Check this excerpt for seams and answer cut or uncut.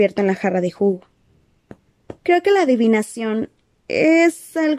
cut